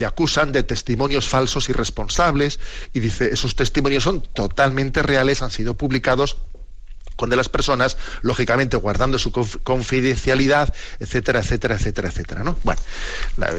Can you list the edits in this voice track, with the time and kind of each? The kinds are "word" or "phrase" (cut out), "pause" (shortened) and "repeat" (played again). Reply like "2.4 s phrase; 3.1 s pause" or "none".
7.3 s word